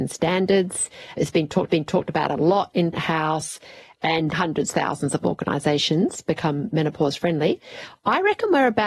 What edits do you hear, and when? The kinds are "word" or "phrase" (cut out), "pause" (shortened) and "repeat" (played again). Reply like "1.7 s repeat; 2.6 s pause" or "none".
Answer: 1.7 s repeat; 2.9 s word; 4.3 s phrase